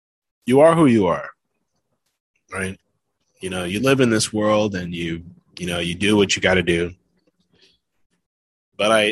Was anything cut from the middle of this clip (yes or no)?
no